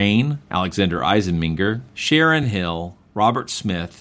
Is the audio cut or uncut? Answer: uncut